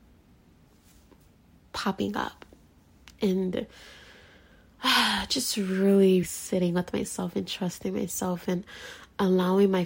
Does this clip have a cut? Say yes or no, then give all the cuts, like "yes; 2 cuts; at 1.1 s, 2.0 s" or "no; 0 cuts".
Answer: yes; 1 cut; at 6.2 s